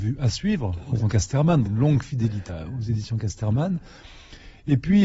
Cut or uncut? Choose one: cut